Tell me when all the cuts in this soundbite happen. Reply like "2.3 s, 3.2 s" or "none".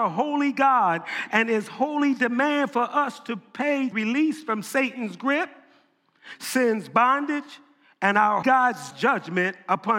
3.9 s, 8.4 s, 8.9 s